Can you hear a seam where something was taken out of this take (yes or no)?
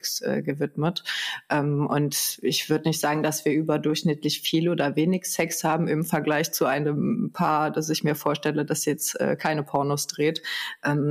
no